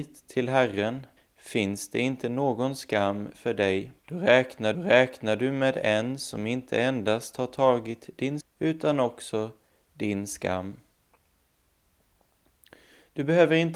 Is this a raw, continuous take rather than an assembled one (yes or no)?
no